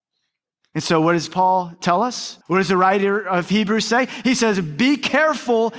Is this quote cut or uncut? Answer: cut